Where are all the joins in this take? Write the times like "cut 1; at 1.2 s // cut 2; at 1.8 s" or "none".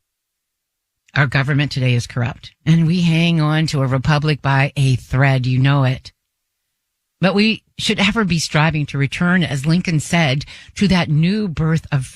none